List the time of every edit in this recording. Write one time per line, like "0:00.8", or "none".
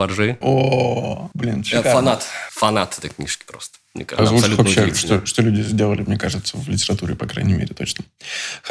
0:04.2